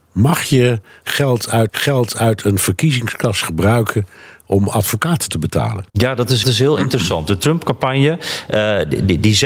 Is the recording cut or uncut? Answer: cut